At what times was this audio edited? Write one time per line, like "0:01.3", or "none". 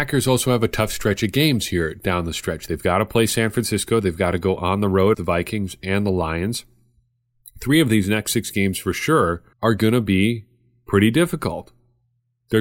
0:05.1
0:09.5